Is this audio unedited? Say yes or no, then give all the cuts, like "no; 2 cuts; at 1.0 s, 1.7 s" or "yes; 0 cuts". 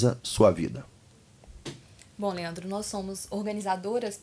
yes; 0 cuts